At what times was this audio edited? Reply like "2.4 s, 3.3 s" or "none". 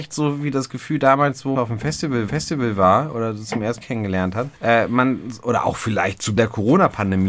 1.5 s, 2.3 s, 3.8 s, 4.6 s, 6.4 s